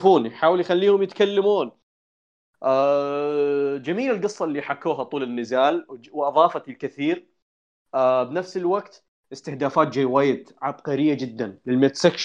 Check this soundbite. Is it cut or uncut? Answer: uncut